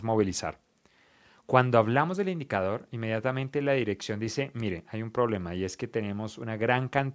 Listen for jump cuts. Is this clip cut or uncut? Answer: uncut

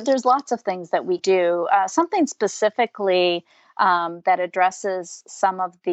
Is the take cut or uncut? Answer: cut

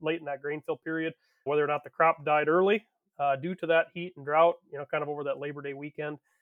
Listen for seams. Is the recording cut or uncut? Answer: cut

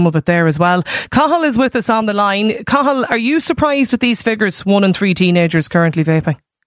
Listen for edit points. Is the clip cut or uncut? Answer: uncut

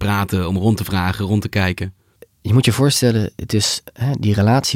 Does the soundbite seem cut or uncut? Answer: uncut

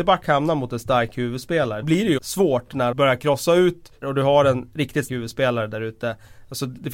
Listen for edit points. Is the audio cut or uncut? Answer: cut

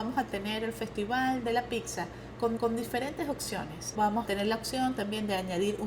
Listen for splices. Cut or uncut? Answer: cut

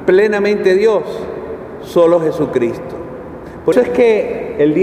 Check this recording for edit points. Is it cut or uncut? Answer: cut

